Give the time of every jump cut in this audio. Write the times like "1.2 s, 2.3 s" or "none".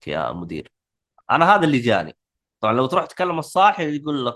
none